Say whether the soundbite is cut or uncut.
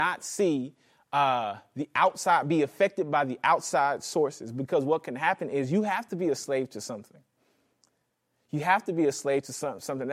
uncut